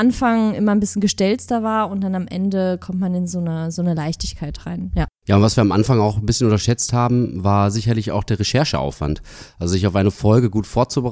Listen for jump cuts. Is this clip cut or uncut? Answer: uncut